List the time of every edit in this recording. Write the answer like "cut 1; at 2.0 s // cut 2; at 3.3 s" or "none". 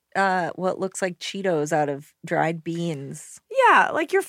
none